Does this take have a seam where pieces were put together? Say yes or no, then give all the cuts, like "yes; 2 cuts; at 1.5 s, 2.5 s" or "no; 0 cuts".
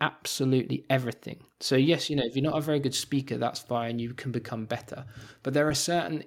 no; 0 cuts